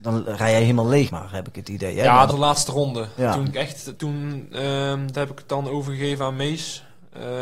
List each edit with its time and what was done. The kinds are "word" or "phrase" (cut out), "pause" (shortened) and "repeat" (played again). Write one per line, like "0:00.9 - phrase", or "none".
0:01.1 - word
0:02.3 - word
0:03.5 - phrase
0:04.0 - word
0:05.1 - phrase